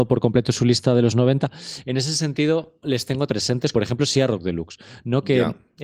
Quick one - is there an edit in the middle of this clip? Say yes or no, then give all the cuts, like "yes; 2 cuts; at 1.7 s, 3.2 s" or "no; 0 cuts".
yes; 3 cuts; at 2.8 s, 3.3 s, 3.7 s